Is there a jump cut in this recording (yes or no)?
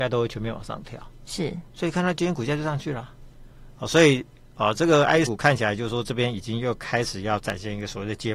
yes